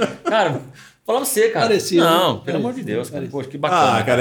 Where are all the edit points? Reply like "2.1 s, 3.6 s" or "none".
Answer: none